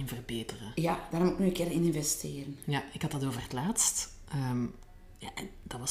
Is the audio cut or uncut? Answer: uncut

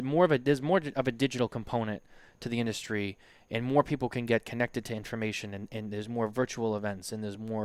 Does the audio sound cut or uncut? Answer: uncut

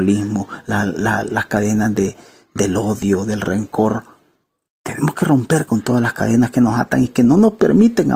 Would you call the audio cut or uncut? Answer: uncut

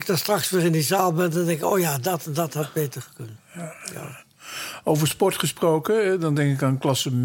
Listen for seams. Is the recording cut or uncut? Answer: uncut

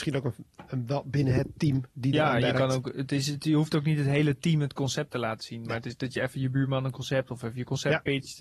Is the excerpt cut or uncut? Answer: uncut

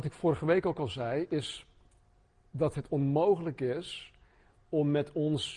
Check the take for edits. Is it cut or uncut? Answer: uncut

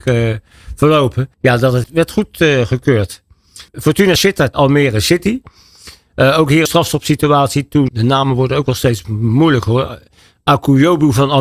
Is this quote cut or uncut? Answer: cut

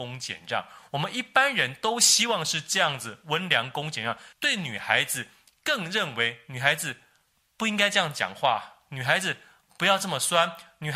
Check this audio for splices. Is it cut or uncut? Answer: cut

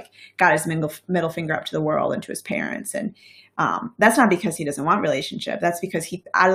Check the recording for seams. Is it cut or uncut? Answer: uncut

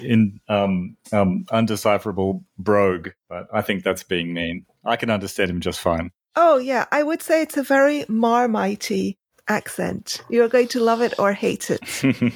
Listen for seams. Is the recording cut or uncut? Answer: cut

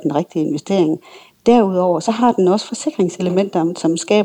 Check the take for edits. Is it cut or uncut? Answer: uncut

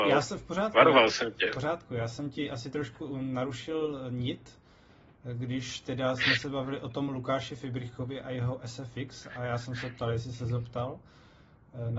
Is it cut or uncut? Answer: uncut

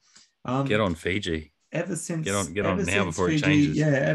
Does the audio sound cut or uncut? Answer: uncut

